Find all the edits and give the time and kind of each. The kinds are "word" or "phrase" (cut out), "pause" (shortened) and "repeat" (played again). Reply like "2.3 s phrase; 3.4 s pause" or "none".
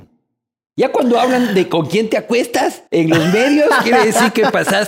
2.9 s pause